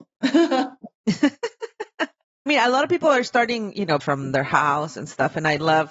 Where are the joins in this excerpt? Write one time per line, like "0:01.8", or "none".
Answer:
0:02.5
0:04.0